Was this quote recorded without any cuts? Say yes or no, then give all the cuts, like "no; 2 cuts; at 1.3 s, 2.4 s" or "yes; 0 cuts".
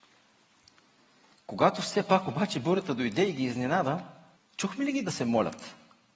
no; 1 cut; at 4.4 s